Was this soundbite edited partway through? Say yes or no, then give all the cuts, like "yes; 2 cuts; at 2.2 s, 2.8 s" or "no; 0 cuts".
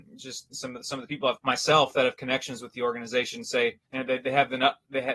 yes; 2 cuts; at 1.4 s, 3.8 s